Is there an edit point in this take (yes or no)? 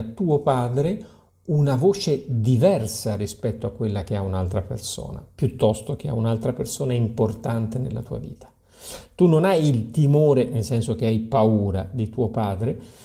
no